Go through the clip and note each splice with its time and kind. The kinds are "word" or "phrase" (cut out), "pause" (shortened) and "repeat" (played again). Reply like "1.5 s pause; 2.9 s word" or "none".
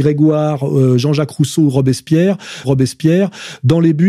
2.6 s repeat